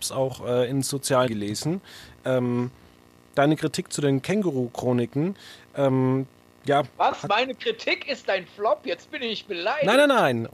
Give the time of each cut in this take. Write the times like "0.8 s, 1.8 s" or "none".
1.3 s